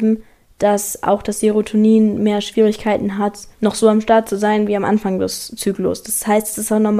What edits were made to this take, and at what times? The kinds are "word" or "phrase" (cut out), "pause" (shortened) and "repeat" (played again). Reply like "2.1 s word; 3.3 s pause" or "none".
3.5 s pause